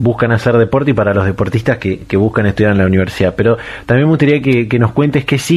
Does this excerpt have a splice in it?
no; 0 cuts

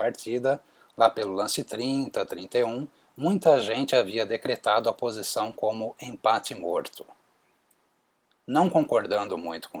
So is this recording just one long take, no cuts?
yes; 0 cuts

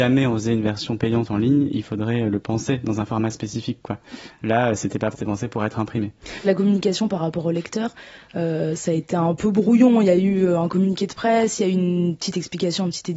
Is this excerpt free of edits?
no; 2 cuts; at 5.1 s, 6.4 s

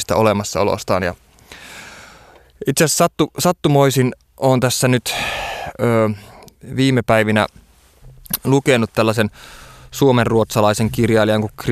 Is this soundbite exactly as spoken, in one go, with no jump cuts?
yes; 0 cuts

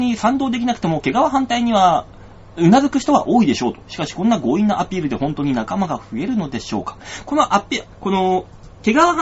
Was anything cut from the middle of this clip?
yes; 1 cut; at 7.9 s

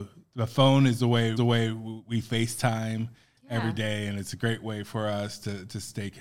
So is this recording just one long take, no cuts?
no; 1 cut; at 1.4 s

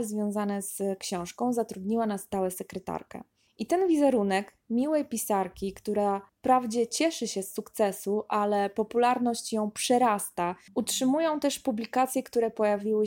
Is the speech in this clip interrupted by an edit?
yes; 1 cut; at 3.5 s

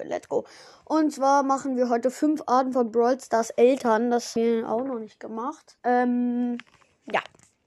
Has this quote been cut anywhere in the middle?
yes; 2 cuts; at 4.4 s, 5.8 s

